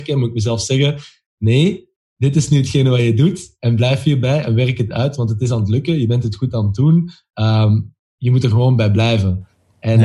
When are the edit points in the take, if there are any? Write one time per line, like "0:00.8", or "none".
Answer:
none